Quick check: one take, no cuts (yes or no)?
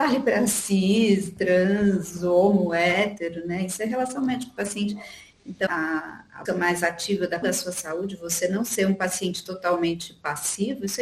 no